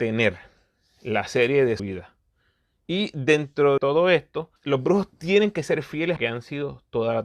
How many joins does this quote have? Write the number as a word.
four